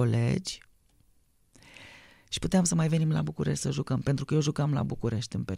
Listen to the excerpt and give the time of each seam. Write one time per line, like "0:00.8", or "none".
none